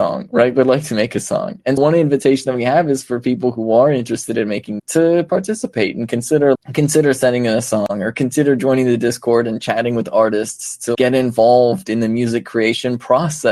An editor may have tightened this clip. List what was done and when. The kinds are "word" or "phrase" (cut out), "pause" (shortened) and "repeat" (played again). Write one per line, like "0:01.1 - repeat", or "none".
0:01.8 - word
0:04.8 - word
0:06.5 - word
0:10.9 - word